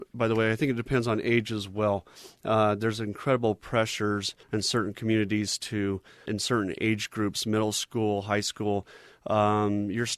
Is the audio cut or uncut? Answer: cut